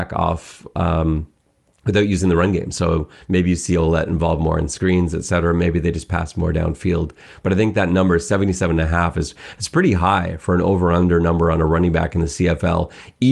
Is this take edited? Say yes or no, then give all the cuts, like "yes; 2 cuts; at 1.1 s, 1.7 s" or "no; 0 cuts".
no; 0 cuts